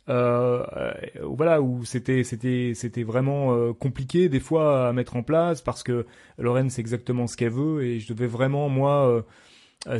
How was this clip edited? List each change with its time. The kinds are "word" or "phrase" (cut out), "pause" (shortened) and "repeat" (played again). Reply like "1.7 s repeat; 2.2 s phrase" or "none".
none